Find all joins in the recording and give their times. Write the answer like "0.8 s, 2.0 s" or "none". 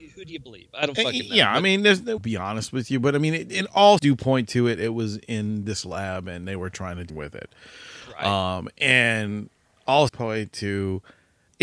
2.2 s, 4.0 s, 7.1 s, 10.1 s